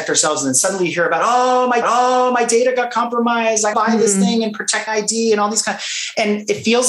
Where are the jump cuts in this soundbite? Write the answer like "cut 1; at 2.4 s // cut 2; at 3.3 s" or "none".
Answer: cut 1; at 1.8 s // cut 2; at 3.7 s // cut 3; at 4.9 s